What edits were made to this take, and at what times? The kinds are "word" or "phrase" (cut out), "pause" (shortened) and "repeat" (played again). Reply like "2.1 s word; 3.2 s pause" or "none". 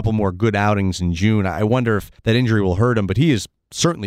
2.2 s pause